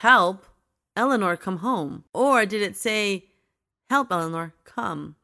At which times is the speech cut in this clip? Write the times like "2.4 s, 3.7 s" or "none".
2.1 s